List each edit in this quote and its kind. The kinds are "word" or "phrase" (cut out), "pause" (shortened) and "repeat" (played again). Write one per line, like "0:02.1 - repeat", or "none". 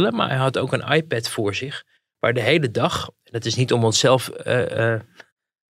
none

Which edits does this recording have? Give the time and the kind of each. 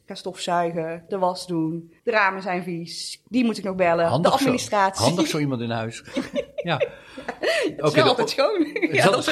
0:02.0 - pause

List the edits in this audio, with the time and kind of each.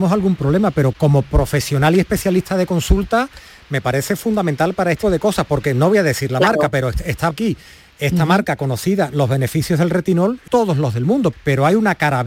0:00.9 - word
0:05.0 - word
0:07.3 - word
0:10.5 - word
0:11.3 - word

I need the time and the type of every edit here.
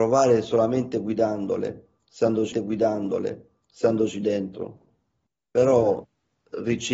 0:02.5 - repeat

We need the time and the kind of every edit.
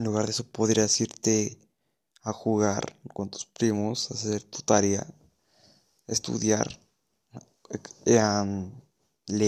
none

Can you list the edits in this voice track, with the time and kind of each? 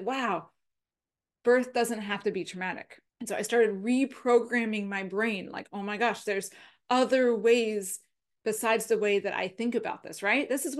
0:03.1 - pause

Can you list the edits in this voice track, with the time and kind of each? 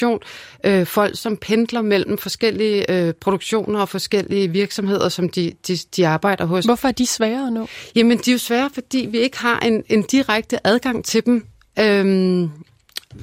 none

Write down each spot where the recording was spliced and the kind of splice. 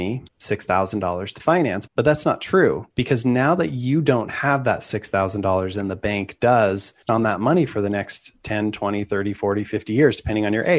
0:01.9 - word
0:02.9 - pause
0:07.1 - phrase

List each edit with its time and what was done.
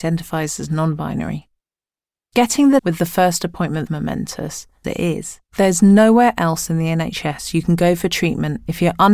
0:02.8 - word
0:03.9 - word
0:04.8 - word
0:05.5 - pause

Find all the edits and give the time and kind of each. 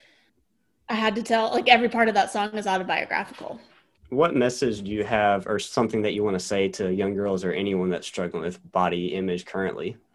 none

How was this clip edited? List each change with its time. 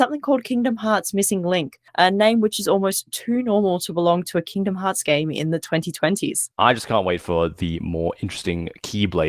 0:01.9 - pause
0:06.5 - pause

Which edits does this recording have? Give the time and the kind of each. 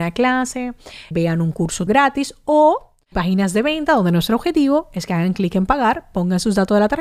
0:01.1 - word
0:01.9 - word
0:03.1 - word

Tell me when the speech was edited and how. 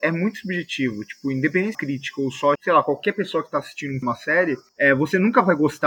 0:01.7 - phrase
0:02.6 - word
0:04.0 - phrase

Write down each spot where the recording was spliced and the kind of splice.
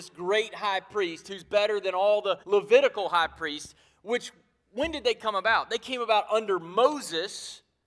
0:02.4 - pause

